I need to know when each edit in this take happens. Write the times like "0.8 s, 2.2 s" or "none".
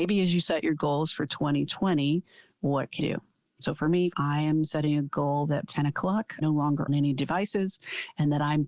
3.0 s, 4.1 s, 5.7 s, 6.4 s, 6.9 s